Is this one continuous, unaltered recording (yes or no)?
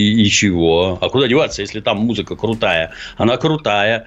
yes